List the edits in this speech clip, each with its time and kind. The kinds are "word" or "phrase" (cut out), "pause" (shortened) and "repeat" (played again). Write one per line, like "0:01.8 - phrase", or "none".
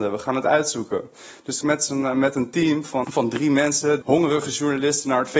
0:01.6 - phrase
0:03.0 - word
0:04.0 - word